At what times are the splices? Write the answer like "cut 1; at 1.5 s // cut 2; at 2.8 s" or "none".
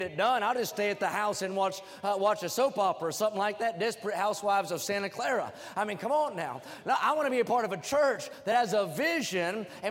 none